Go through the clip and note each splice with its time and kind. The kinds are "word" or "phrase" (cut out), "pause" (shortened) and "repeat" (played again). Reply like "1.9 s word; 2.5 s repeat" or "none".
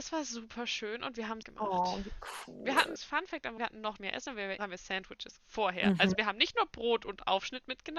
1.4 s word; 3.0 s word; 3.6 s word; 4.0 s word; 4.6 s word; 5.4 s word